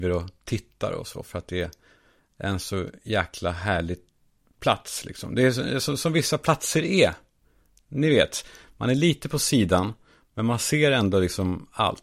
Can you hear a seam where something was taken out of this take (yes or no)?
no